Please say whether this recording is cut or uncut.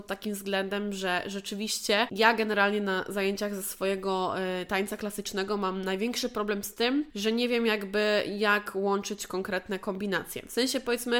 uncut